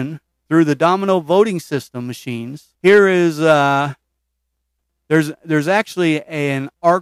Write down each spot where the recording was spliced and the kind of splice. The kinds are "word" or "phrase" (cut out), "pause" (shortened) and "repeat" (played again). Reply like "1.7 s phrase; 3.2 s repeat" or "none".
2.8 s pause